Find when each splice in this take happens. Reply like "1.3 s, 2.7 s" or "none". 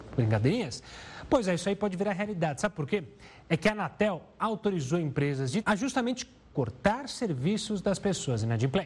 5.6 s